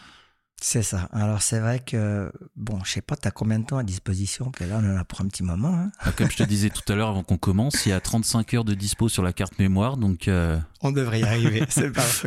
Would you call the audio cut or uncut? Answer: cut